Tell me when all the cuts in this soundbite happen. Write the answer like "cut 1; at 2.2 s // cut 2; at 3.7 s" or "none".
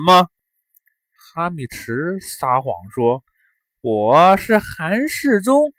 none